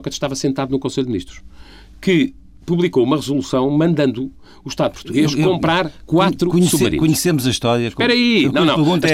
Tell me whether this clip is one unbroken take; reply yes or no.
yes